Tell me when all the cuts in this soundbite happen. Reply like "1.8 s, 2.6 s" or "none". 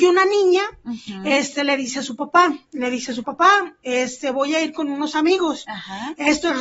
3.2 s